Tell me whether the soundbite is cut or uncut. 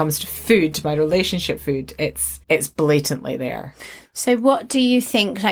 cut